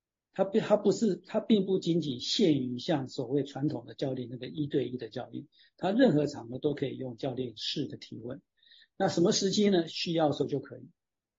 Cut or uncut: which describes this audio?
uncut